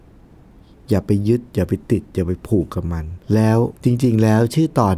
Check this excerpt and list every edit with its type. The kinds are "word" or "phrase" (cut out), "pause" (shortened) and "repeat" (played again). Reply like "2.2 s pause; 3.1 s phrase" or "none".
3.2 s pause; 3.8 s pause